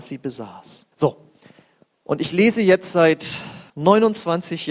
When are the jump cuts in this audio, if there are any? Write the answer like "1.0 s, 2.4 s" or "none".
0.9 s, 3.7 s